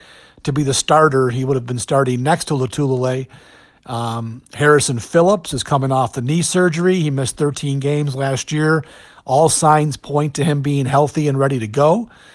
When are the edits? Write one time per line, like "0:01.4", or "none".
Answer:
none